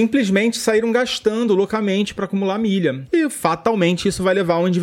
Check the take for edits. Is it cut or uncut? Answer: uncut